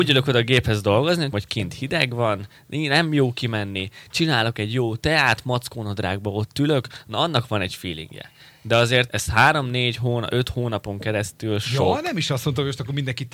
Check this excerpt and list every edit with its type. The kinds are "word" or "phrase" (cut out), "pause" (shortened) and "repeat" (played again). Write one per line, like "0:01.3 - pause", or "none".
0:01.3 - word
0:09.1 - word